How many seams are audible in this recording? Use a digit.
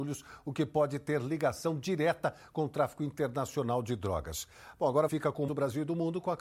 2